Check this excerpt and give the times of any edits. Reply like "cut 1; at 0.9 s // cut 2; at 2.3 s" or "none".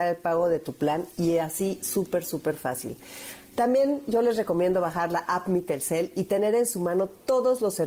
none